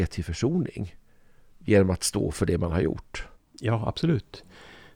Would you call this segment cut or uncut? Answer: cut